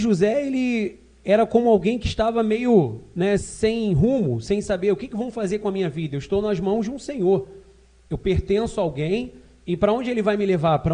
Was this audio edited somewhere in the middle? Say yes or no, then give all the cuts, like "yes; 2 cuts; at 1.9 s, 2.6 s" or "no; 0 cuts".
yes; 1 cut; at 3.4 s